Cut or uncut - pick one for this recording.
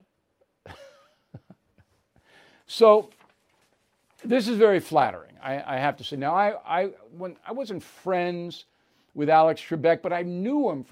uncut